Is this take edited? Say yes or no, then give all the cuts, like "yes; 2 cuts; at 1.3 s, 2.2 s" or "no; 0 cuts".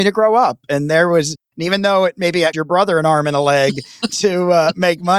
yes; 1 cut; at 2.5 s